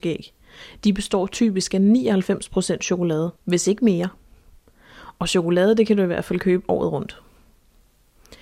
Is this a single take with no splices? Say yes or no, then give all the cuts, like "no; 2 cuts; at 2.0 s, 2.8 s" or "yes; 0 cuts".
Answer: no; 1 cut; at 3.4 s